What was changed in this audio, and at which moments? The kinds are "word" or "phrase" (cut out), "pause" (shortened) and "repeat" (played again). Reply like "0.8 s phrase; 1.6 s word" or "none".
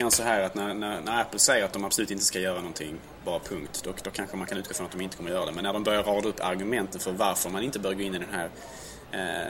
none